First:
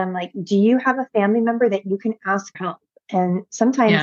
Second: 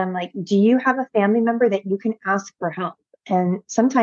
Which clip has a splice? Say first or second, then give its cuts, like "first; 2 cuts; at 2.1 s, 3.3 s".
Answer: first; 1 cut; at 2.5 s